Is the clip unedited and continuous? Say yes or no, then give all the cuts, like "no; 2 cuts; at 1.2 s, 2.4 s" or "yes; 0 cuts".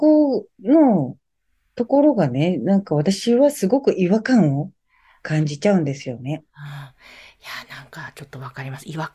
yes; 0 cuts